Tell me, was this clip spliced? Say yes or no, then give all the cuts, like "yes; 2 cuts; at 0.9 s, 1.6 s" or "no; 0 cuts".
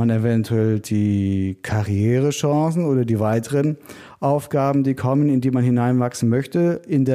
no; 0 cuts